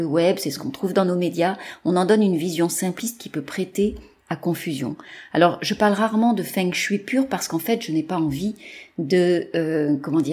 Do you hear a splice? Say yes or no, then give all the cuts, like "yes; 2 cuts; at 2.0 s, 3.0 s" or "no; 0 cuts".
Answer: no; 0 cuts